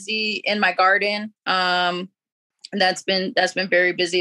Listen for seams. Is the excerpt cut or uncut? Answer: cut